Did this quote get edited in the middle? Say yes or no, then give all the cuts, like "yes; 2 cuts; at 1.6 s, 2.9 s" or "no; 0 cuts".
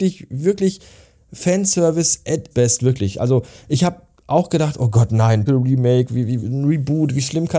yes; 3 cuts; at 2.5 s, 5.5 s, 6.4 s